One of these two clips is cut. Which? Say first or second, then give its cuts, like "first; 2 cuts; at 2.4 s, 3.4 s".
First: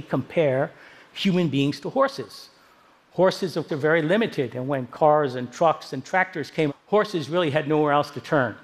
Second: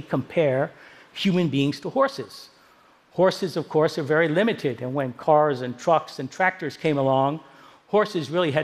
first; 2 cuts; at 3.7 s, 6.7 s